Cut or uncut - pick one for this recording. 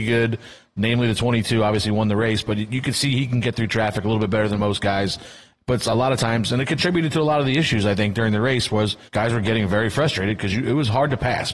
cut